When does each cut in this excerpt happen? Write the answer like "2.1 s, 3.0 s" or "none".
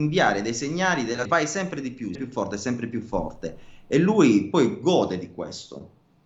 1.2 s, 2.1 s